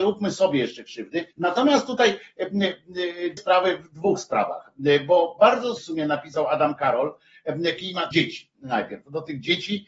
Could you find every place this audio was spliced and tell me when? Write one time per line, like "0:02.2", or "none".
0:01.3
0:03.4
0:05.8
0:07.8
0:08.1